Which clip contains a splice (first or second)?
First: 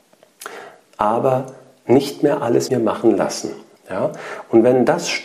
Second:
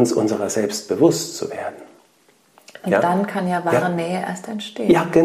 first